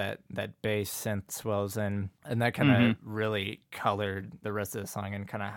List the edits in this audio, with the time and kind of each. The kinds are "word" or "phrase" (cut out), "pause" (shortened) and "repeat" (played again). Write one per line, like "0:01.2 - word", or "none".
0:01.3 - word
0:02.2 - pause
0:04.4 - word

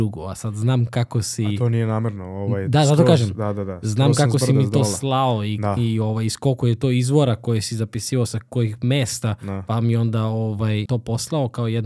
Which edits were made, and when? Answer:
0:10.9 - word

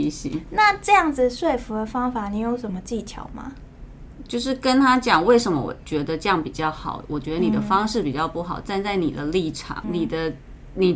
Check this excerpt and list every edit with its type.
0:09.8 - word

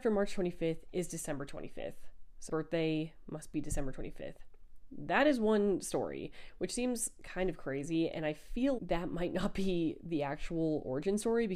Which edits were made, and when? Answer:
0:02.5 - word
0:08.8 - word

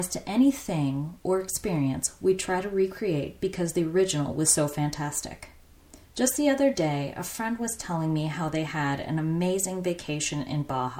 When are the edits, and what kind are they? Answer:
0:06.0 - pause

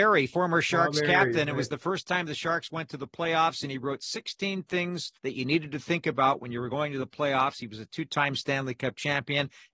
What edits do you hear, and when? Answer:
0:05.2 - pause

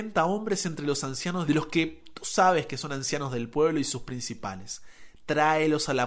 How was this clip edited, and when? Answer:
0:01.5 - phrase

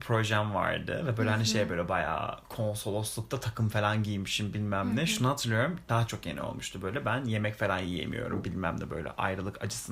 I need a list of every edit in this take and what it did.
0:02.4 - pause
0:06.1 - word

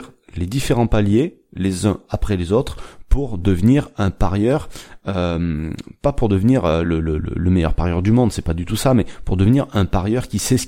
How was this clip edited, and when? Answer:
none

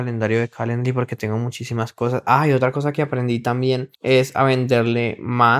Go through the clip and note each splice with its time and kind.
0:03.9 - pause

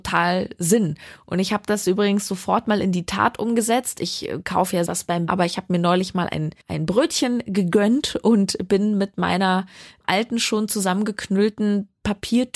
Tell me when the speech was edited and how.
0:04.9 - phrase
0:05.3 - word
0:06.6 - pause

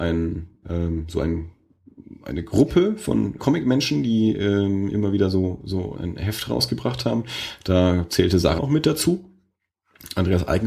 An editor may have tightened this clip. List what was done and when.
0:03.4 - word
0:05.9 - word
0:08.6 - word

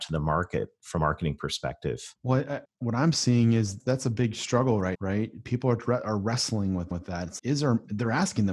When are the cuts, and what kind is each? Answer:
0:01.0 - word
0:02.2 - pause
0:02.6 - word
0:03.8 - word
0:04.9 - word
0:06.9 - repeat
0:07.4 - word

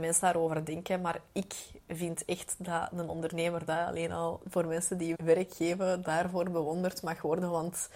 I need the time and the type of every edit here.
0:05.1 - word

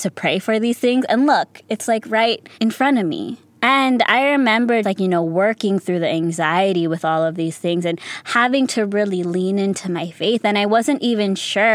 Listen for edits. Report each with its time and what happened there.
0:02.5 - pause
0:03.5 - pause
0:04.8 - word

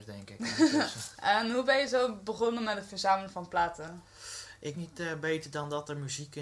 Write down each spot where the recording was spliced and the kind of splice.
0:04.7 - word

